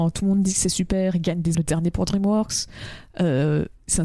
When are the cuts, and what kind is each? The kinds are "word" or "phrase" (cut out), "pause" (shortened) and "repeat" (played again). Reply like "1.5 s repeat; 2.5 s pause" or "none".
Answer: 1.5 s word